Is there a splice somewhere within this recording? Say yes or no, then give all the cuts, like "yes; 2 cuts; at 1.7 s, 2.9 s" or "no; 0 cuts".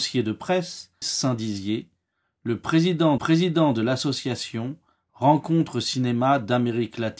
yes; 2 cuts; at 1.0 s, 3.2 s